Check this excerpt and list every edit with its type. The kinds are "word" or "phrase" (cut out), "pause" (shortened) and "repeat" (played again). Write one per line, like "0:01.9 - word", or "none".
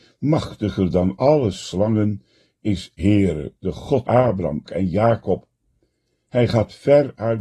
0:03.0 - word
0:04.1 - word
0:04.7 - word